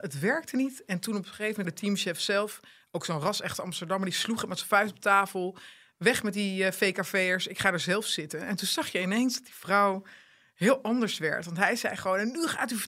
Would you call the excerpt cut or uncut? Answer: cut